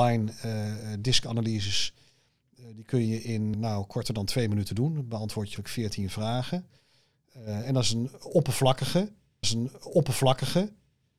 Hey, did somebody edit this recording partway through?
yes; 3 cuts; at 3.5 s, 5.6 s, 9.4 s

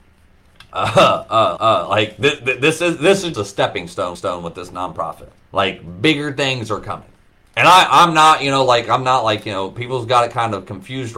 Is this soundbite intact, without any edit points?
no; 5 cuts; at 1.6 s, 3.3 s, 4.1 s, 5.4 s, 7.3 s

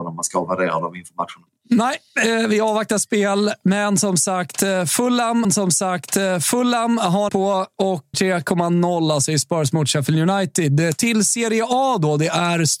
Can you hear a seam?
yes; 3 cuts; at 5.4 s, 7.3 s, 8.1 s

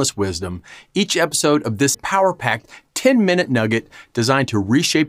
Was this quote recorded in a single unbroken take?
no; 1 cut; at 1.9 s

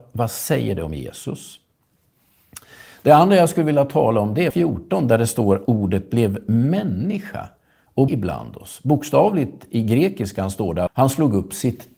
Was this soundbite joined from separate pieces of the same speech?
yes; 4 cuts; at 4.5 s, 5.7 s, 8.1 s, 10.9 s

